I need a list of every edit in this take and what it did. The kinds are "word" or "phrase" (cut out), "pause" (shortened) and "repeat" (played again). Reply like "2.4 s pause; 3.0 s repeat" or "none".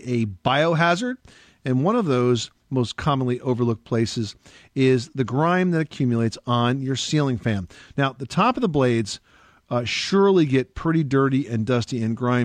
none